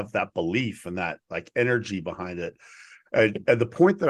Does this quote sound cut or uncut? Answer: uncut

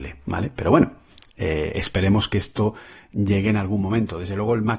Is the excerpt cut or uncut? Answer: uncut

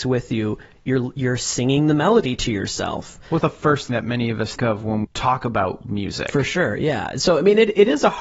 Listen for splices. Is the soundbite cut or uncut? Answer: cut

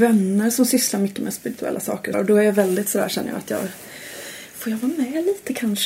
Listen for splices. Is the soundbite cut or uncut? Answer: cut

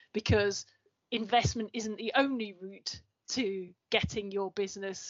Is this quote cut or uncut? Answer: cut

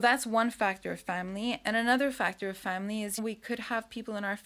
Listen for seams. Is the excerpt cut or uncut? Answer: cut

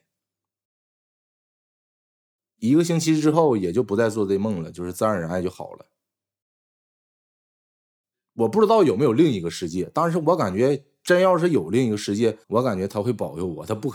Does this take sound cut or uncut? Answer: cut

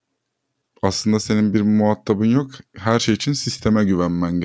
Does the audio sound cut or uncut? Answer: uncut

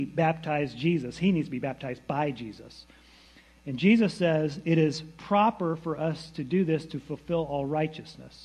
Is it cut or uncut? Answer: uncut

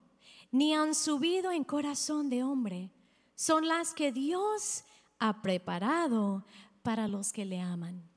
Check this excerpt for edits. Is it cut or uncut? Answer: uncut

